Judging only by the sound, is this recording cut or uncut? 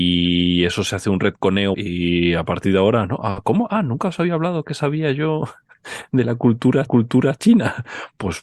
cut